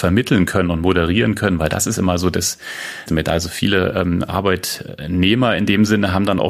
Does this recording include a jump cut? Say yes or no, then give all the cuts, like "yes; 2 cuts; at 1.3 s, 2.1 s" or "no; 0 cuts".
yes; 1 cut; at 3.1 s